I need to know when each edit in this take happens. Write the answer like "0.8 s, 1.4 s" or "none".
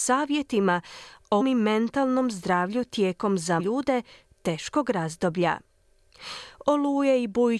1.4 s, 3.6 s